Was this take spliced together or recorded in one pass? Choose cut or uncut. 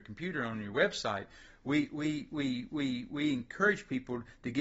cut